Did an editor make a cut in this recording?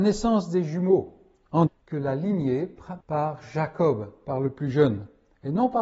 yes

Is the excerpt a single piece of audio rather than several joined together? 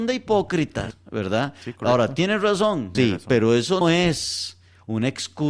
no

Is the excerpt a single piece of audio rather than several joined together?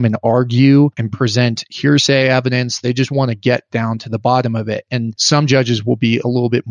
yes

